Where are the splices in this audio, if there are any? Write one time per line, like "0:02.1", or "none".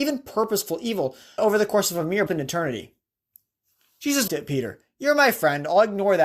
0:01.4
0:02.3
0:04.3